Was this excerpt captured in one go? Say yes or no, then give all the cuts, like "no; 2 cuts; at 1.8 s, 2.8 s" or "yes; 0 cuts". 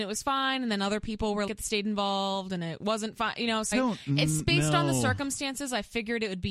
no; 2 cuts; at 1.5 s, 3.7 s